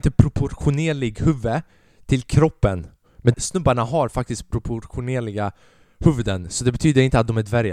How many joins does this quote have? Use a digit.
1